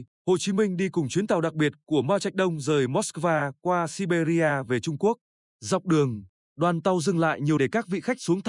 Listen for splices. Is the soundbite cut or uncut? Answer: cut